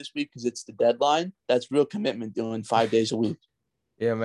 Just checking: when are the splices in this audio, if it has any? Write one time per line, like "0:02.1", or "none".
0:01.4